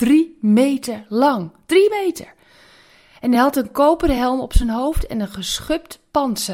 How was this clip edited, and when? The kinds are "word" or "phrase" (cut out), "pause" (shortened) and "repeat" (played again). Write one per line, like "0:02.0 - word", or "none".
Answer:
none